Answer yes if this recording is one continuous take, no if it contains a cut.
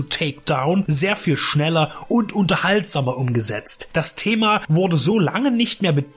yes